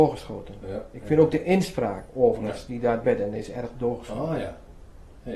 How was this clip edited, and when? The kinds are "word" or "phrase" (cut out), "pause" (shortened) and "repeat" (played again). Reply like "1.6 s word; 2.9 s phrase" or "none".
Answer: 3.0 s word